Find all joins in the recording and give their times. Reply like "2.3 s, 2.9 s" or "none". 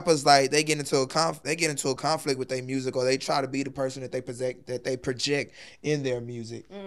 none